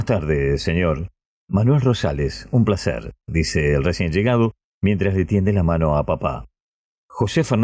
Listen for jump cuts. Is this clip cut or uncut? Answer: uncut